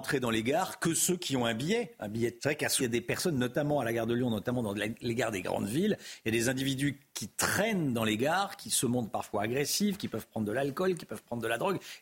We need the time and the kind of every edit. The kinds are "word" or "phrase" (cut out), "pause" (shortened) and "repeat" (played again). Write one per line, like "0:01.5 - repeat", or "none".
0:02.4 - word
0:02.8 - word